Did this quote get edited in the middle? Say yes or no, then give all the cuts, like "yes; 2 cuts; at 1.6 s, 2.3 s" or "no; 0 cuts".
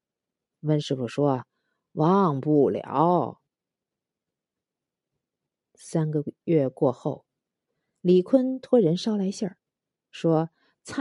no; 0 cuts